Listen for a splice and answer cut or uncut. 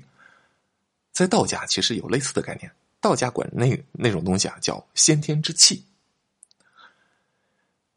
uncut